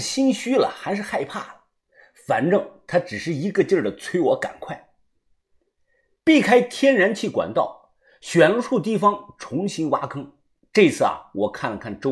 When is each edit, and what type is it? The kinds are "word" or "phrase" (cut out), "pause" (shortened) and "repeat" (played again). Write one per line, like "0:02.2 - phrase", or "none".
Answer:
none